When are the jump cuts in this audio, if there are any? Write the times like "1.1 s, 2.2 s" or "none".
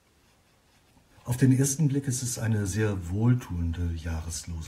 none